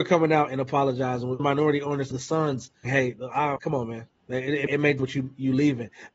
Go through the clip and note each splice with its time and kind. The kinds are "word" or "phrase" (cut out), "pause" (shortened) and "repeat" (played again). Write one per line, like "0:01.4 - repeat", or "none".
0:01.4 - word
0:02.1 - word
0:02.8 - word
0:03.6 - word
0:04.2 - pause
0:04.7 - word
0:05.0 - phrase